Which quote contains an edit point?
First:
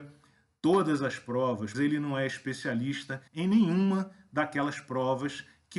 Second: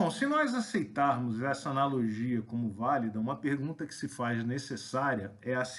first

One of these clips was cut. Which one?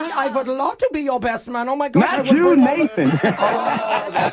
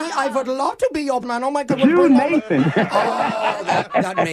second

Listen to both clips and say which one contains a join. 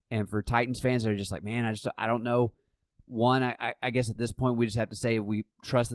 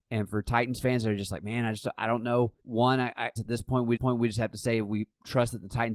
second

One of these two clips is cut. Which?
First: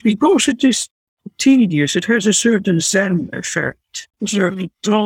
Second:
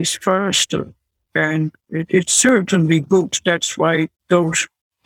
first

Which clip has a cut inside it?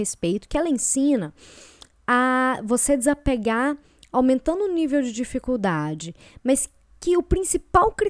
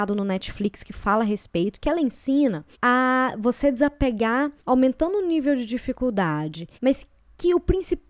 second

